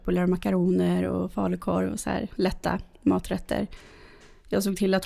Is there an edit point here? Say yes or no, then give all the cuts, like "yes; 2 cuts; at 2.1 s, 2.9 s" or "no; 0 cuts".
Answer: no; 0 cuts